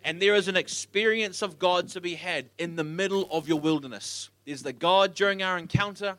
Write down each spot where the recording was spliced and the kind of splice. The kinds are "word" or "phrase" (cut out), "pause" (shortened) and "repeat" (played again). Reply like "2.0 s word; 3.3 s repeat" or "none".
2.5 s pause; 4.4 s pause